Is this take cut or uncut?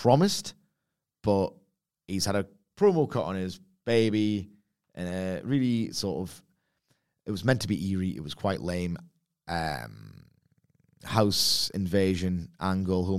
uncut